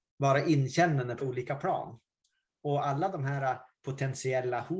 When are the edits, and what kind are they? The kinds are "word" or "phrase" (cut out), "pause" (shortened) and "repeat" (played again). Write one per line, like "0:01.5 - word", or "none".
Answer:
0:01.2 - word